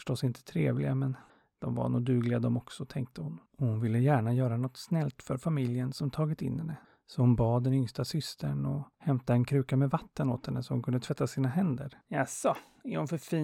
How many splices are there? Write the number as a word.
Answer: five